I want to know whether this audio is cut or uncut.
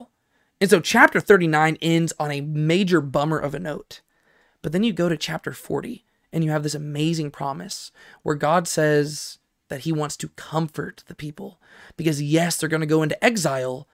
uncut